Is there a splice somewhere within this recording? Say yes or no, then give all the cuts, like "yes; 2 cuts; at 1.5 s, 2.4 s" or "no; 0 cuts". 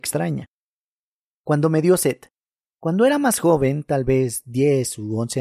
no; 0 cuts